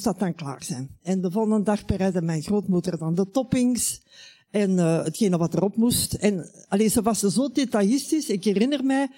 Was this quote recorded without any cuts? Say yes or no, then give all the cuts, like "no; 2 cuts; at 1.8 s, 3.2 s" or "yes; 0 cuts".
yes; 0 cuts